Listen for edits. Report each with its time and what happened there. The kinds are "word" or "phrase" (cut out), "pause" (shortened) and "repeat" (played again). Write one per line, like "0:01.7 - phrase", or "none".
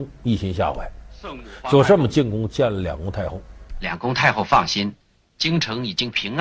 none